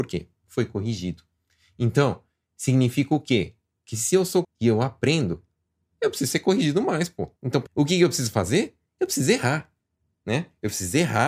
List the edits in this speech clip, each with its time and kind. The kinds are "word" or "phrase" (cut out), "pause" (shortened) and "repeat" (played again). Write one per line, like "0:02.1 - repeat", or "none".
0:04.4 - word
0:07.4 - pause
0:07.7 - phrase